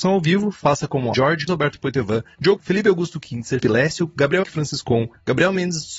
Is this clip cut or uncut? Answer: cut